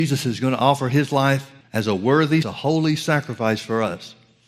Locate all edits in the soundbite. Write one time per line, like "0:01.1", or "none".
0:01.6
0:02.4

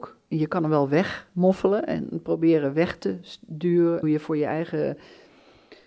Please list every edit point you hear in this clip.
0:04.0

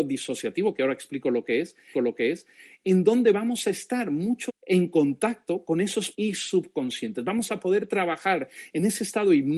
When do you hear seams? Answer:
0:01.9
0:04.5
0:06.1

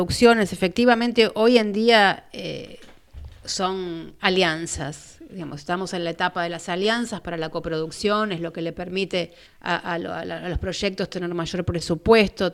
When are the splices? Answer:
0:09.5

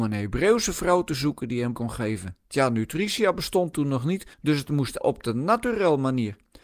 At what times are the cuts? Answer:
0:01.7
0:02.4
0:04.3
0:05.0

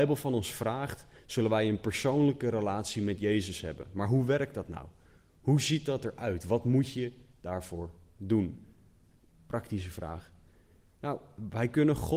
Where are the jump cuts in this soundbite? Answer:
none

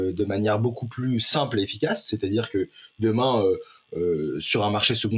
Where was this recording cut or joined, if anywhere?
none

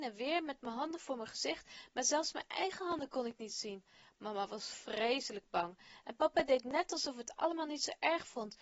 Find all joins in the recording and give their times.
none

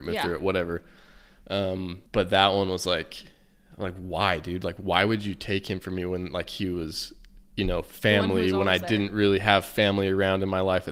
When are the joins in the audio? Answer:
0:02.1

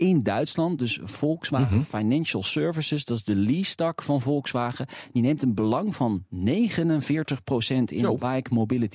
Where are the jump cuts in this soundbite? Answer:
none

